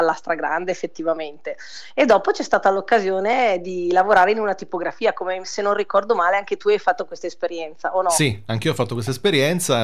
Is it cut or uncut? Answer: uncut